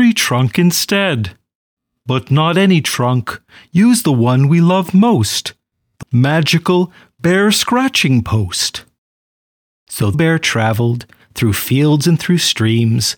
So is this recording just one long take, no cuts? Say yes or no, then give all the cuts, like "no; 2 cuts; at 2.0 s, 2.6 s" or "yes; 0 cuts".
no; 2 cuts; at 6.0 s, 10.1 s